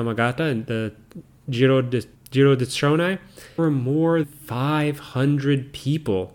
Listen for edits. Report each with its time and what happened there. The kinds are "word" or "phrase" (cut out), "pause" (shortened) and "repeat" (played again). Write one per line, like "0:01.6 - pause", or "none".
0:02.1 - word
0:03.6 - word
0:04.2 - word